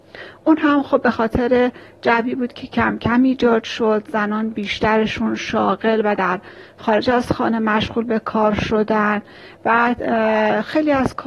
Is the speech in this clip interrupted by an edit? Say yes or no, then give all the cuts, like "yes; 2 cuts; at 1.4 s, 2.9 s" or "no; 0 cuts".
no; 0 cuts